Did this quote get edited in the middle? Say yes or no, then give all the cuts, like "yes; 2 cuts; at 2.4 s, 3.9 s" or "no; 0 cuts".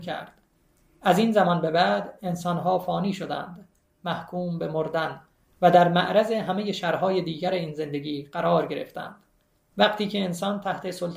no; 0 cuts